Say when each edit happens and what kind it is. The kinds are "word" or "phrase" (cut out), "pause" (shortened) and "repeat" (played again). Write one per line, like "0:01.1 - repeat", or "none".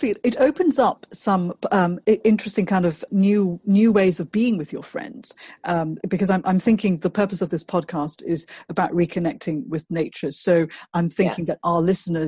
0:03.1 - word
0:06.0 - word